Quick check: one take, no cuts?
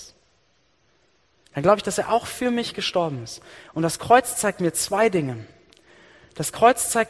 yes; 0 cuts

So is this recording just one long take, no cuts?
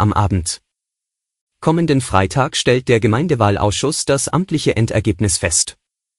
yes; 0 cuts

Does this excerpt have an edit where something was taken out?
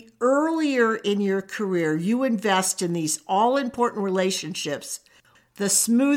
no; 0 cuts

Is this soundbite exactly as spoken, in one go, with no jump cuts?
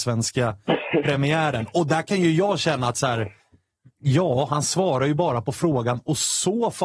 yes; 0 cuts

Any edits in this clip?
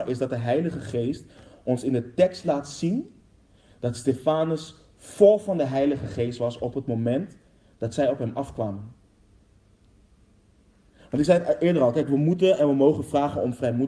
no; 0 cuts

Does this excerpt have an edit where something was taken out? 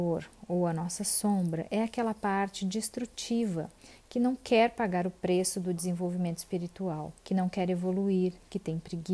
yes; 1 cut; at 7.2 s

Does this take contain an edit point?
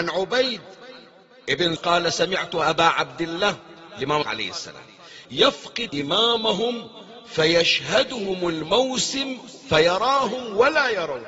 yes; 4 cuts; at 1.8 s, 4.2 s, 5.2 s, 5.9 s

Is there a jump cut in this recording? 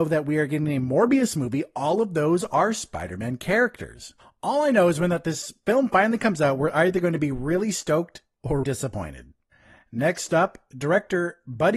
yes; 1 cut; at 8.6 s

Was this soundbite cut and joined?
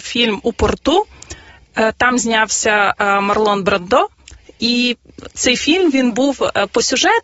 no; 0 cuts

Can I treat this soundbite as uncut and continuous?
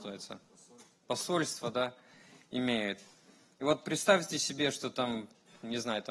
yes; 0 cuts

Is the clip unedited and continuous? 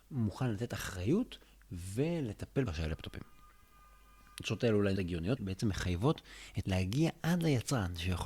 no; 4 cuts; at 2.7 s, 5.0 s, 5.4 s, 6.6 s

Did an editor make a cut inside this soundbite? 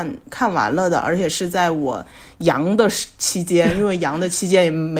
no; 0 cuts

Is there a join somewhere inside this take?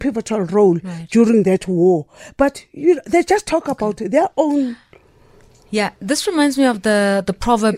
no; 0 cuts

